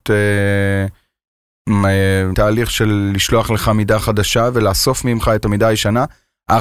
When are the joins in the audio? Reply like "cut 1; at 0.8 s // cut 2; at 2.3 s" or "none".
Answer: cut 1; at 2.3 s